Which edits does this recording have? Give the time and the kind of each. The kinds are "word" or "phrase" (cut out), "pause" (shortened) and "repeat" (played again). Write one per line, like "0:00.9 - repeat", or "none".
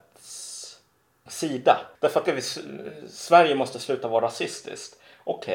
0:01.3 - word
0:01.9 - pause
0:02.3 - phrase